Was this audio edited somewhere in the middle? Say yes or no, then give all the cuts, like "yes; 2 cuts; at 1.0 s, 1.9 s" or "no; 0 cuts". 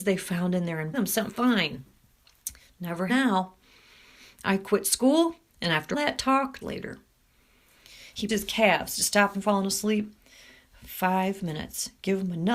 yes; 8 cuts; at 0.9 s, 1.3 s, 3.1 s, 5.5 s, 5.9 s, 6.6 s, 8.3 s, 9.3 s